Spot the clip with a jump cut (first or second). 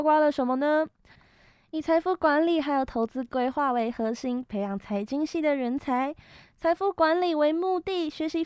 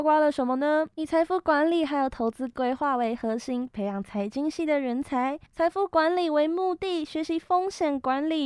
second